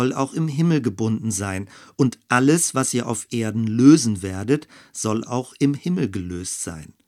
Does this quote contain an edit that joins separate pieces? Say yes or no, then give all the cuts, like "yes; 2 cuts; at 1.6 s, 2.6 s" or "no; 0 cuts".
no; 0 cuts